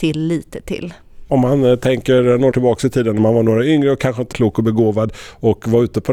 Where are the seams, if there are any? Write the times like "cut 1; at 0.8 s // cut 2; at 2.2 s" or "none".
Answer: cut 1; at 2.5 s // cut 2; at 4.3 s